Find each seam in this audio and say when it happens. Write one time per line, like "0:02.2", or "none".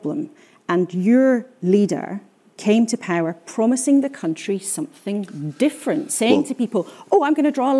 none